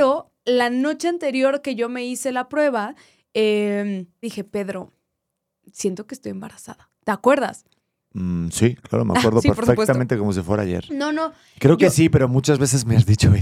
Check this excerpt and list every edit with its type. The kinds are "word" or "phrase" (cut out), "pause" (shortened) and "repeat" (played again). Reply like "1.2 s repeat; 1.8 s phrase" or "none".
4.2 s word